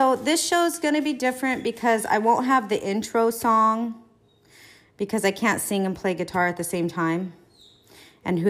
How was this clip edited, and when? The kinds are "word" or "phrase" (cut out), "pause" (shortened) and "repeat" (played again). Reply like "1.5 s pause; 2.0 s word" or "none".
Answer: none